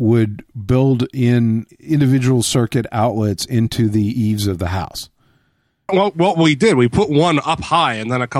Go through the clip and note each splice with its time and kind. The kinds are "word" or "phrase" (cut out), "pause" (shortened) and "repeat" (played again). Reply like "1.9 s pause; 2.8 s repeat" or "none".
1.7 s word; 5.9 s phrase